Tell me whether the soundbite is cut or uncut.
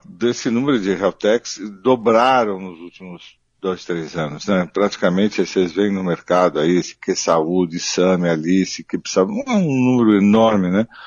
uncut